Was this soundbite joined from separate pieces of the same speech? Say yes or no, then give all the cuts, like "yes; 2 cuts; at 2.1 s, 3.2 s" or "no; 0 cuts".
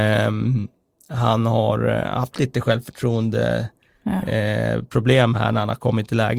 no; 0 cuts